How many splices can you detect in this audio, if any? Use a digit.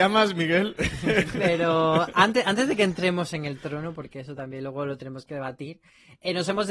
0